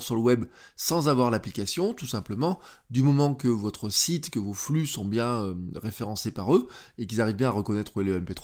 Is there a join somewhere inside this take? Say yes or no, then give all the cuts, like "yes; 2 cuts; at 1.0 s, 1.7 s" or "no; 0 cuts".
no; 0 cuts